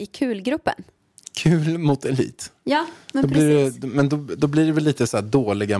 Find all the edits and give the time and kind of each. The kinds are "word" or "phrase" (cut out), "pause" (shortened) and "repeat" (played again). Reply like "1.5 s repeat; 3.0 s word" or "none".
none